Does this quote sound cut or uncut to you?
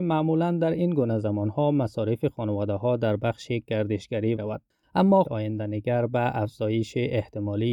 cut